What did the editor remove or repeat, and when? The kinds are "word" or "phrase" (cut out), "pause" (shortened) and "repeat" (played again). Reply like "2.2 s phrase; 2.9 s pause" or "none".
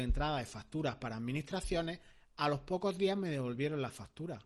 none